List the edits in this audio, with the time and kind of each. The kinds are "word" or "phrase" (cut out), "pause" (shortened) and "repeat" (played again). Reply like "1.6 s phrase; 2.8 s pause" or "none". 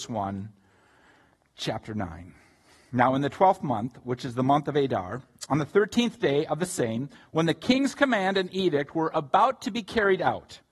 none